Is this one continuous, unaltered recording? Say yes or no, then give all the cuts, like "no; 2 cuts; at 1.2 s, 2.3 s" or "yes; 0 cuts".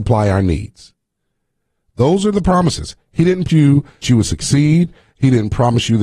no; 2 cuts; at 3.5 s, 4.0 s